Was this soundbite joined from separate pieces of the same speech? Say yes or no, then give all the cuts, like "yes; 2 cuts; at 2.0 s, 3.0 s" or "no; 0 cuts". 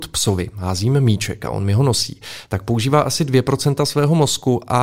no; 0 cuts